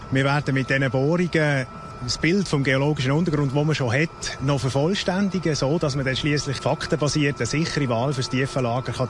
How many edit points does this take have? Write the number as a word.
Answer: one